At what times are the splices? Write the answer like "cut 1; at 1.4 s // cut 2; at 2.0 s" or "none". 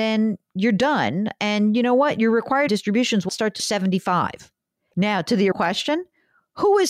cut 1; at 2.7 s // cut 2; at 3.3 s // cut 3; at 3.6 s // cut 4; at 5.5 s